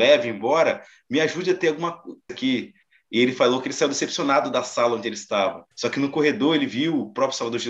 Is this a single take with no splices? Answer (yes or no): no